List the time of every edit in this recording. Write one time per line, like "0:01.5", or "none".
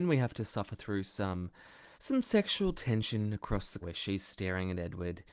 0:02.0
0:03.8